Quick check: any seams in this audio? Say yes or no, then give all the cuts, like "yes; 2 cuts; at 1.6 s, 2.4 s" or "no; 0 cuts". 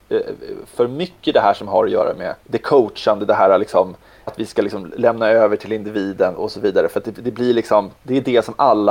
yes; 5 cuts; at 2.4 s, 4.3 s, 6.3 s, 7.2 s, 8.0 s